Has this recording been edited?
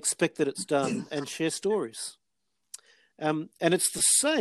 no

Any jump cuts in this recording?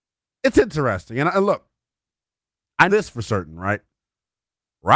yes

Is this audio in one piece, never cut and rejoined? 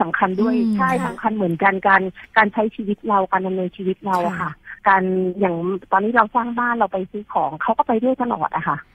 no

